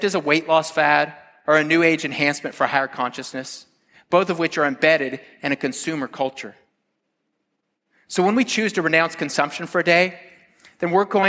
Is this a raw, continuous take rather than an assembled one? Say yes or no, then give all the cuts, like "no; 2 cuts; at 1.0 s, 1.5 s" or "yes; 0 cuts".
yes; 0 cuts